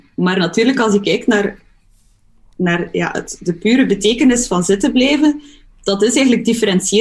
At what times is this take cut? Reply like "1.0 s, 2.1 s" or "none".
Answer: none